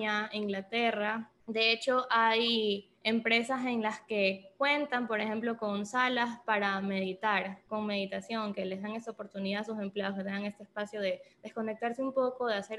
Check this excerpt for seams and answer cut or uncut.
cut